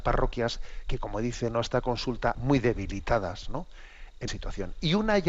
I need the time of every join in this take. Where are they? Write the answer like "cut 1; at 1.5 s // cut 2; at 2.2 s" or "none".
cut 1; at 2.3 s // cut 2; at 4.3 s